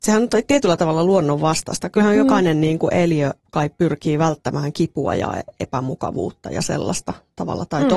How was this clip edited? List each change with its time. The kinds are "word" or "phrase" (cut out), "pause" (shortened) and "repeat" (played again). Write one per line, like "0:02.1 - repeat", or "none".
0:03.4 - pause